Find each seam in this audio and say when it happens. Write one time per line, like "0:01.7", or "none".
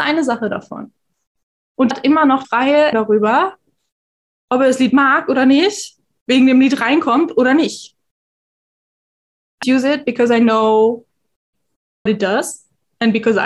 0:01.9
0:02.4
0:02.9
0:09.6
0:12.1